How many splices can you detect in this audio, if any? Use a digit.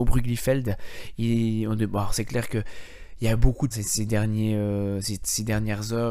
1